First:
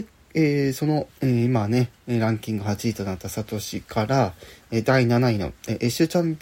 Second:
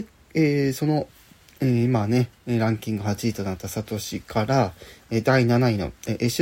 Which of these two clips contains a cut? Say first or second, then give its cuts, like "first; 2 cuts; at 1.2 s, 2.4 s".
first; 1 cut; at 1.2 s